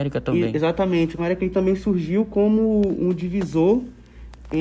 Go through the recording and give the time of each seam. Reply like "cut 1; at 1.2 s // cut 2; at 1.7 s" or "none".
cut 1; at 1.2 s